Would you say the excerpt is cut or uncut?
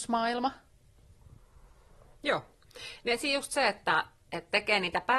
uncut